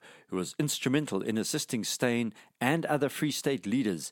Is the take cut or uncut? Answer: uncut